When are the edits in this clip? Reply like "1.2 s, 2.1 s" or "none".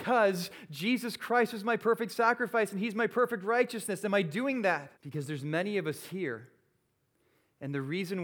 5.0 s

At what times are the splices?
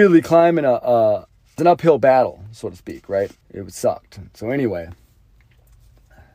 1.6 s, 3.4 s

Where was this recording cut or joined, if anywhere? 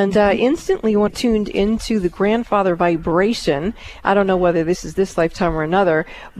1.1 s

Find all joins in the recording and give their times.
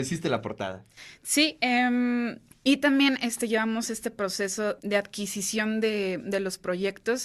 2.5 s, 4.8 s

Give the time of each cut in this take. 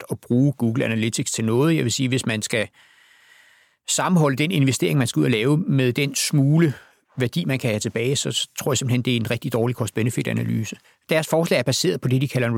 10.8 s

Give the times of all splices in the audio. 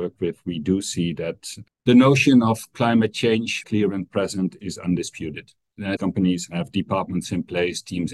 3.6 s, 6.0 s

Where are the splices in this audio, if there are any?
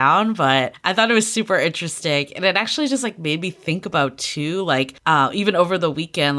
none

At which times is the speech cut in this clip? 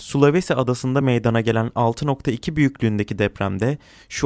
none

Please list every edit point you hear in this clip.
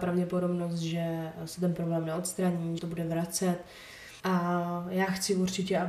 2.8 s, 4.2 s

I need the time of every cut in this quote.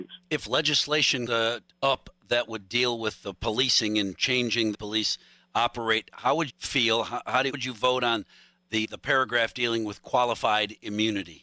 1.3 s, 1.7 s, 4.7 s, 6.5 s, 7.5 s, 8.8 s

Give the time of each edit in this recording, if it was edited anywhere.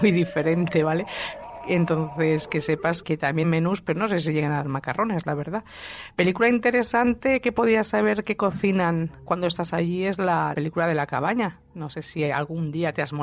3.0 s, 3.4 s, 4.6 s, 6.1 s, 9.3 s, 10.5 s

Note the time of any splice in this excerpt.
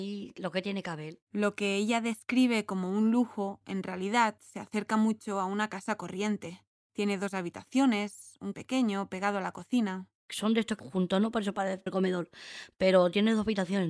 1.2 s, 8.5 s, 10.8 s, 11.9 s

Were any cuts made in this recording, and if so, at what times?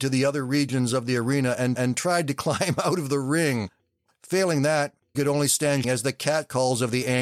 1.8 s, 5.1 s, 5.8 s

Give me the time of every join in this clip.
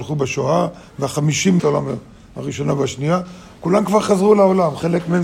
1.6 s

